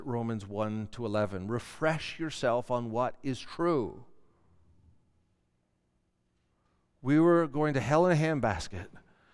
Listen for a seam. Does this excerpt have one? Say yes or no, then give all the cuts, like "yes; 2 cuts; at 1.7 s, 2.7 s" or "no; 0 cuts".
no; 0 cuts